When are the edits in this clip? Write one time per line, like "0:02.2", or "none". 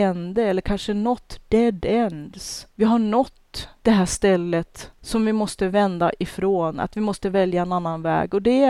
none